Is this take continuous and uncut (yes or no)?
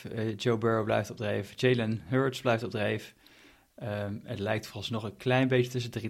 yes